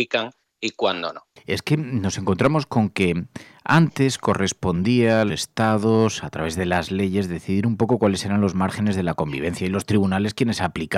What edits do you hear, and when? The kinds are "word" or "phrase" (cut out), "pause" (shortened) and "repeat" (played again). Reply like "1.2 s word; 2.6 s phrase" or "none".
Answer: 5.3 s word

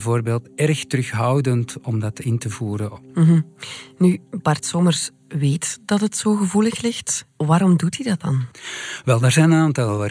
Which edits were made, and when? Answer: none

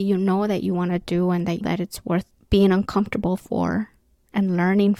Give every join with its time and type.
2.3 s pause

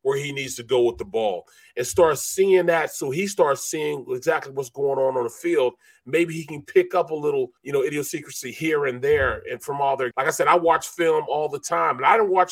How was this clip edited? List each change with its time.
7.6 s pause; 10.1 s phrase

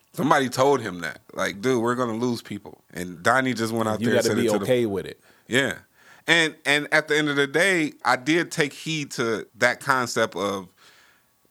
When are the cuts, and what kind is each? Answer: 2.8 s pause; 8.0 s word; 9.5 s pause

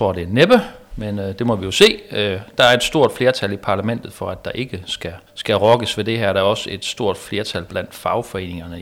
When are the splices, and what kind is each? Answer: 5.3 s pause

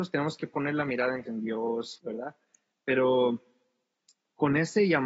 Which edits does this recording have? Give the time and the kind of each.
1.3 s word; 2.0 s word

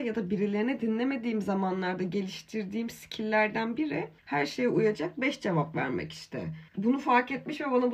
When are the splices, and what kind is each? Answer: 4.2 s pause; 6.7 s pause

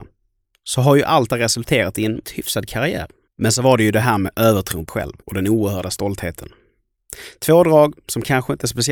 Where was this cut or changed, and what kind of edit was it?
1.3 s word; 2.2 s word; 3.3 s pause; 4.9 s word; 5.2 s pause

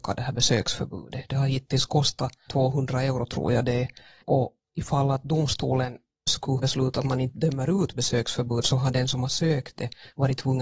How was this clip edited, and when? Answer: 2.5 s word; 4.2 s word; 6.3 s word; 6.6 s phrase

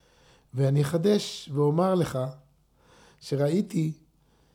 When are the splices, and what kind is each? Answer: none

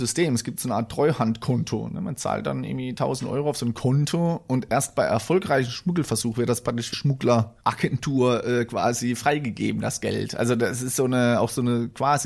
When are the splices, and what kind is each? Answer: 6.9 s word

